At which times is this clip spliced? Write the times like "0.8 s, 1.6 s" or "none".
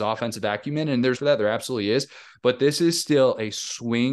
1.2 s

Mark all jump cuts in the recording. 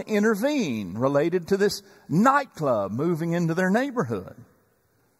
none

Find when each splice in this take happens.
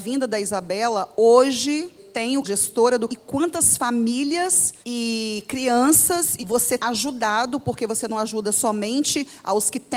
2.0 s, 2.4 s, 3.1 s, 4.8 s, 6.4 s, 6.8 s

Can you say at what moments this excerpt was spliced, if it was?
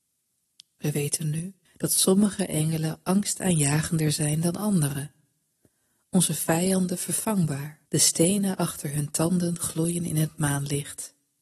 1.7 s, 7.9 s

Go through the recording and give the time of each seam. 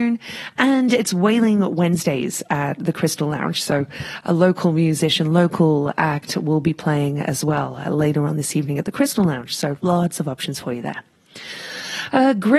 none

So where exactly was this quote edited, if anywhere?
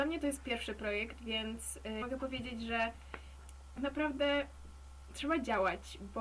2.0 s, 3.8 s

